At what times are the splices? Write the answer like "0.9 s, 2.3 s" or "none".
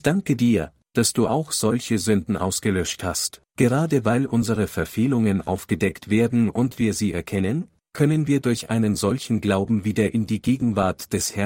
3.5 s